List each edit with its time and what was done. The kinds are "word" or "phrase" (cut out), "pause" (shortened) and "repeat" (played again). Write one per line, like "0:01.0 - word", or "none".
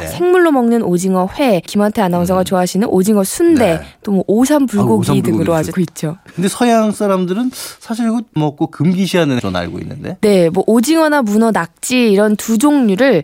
0:01.7 - phrase
0:05.7 - phrase
0:06.3 - pause
0:08.4 - phrase
0:09.4 - word